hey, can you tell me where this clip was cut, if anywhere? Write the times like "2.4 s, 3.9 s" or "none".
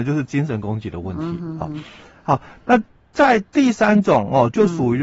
none